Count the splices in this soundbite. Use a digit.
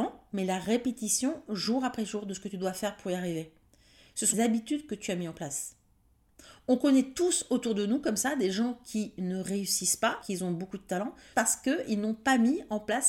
3